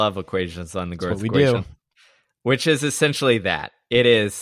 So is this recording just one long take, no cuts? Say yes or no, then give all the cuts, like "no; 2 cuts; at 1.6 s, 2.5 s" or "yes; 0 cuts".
yes; 0 cuts